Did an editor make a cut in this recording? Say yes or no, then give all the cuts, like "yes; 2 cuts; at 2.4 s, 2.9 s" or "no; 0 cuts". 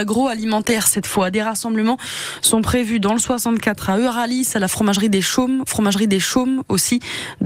yes; 1 cut; at 5.7 s